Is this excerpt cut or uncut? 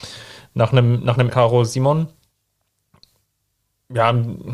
cut